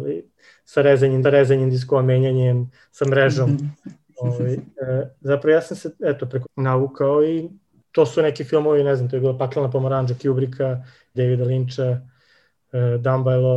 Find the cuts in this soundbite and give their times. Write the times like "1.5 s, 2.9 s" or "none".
1.2 s, 6.4 s, 11.1 s